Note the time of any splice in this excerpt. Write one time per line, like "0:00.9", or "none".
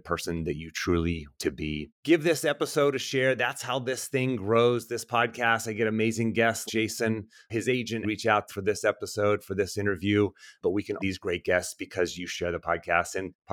0:01.3
0:01.9
0:06.7
0:08.0
0:08.5
0:11.0